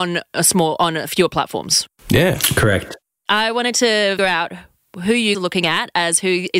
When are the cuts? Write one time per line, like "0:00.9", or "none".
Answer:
0:04.2
0:05.3